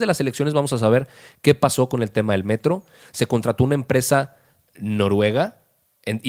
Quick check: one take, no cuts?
yes; 0 cuts

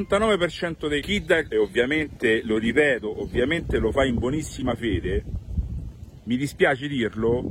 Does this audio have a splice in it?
yes; 2 cuts; at 1.0 s, 1.5 s

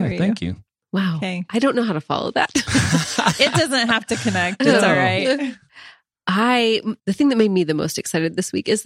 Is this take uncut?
no; 1 cut; at 7.0 s

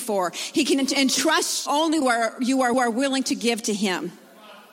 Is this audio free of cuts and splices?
no; 3 cuts; at 1.7 s, 2.0 s, 2.7 s

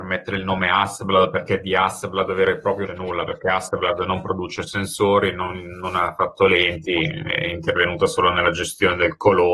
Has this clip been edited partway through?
yes; 1 cut; at 2.9 s

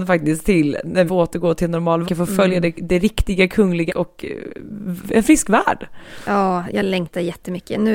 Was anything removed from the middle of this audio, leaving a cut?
yes; 3 cuts; at 1.1 s, 2.0 s, 3.9 s

